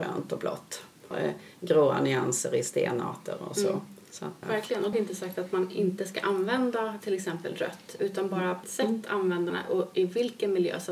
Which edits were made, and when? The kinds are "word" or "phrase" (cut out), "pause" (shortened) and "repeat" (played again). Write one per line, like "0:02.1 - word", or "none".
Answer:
0:01.1 - word
0:04.4 - word
0:04.9 - word
0:08.0 - word
0:08.6 - word
0:09.5 - word

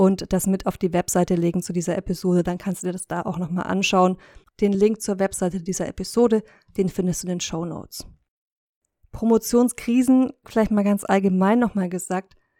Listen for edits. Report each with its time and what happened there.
none

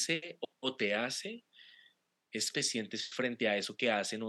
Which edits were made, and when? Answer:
0:02.5 - word

